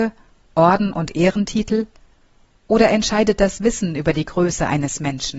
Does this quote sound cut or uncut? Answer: uncut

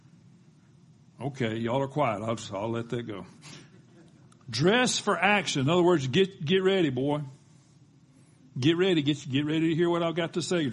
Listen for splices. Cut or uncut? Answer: uncut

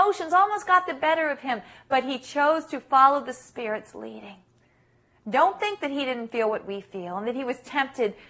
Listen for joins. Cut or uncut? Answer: uncut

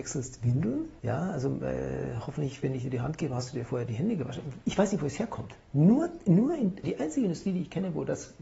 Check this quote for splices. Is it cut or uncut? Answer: cut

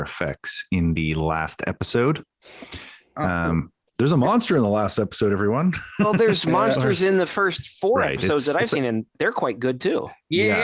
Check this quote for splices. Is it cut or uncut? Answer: uncut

